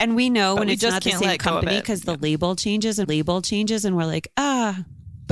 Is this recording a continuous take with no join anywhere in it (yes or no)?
no